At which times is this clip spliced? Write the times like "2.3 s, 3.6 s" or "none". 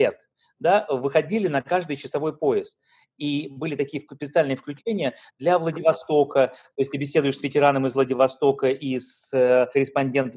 none